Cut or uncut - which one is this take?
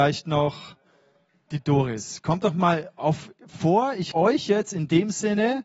cut